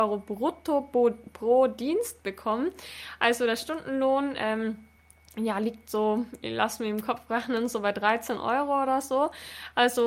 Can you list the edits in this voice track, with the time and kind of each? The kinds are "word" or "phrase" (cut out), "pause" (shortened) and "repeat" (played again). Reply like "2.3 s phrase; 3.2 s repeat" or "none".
none